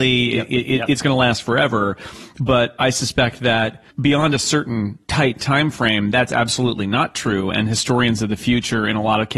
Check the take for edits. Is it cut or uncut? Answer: cut